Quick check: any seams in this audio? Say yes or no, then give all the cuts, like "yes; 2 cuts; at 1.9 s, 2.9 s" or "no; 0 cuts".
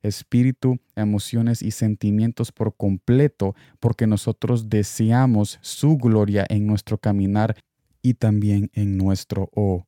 no; 0 cuts